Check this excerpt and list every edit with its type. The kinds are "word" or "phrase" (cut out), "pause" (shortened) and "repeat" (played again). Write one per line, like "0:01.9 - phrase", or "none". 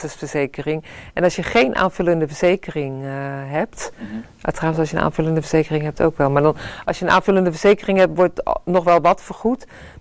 none